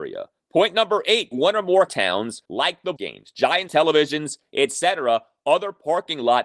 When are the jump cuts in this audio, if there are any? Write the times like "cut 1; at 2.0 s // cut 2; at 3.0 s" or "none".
cut 1; at 1.3 s // cut 2; at 1.9 s // cut 3; at 2.4 s // cut 4; at 3.0 s // cut 5; at 3.7 s